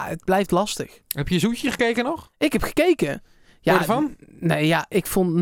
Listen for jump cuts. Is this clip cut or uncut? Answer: uncut